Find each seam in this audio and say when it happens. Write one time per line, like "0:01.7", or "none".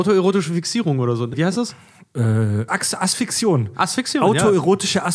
0:01.3
0:02.7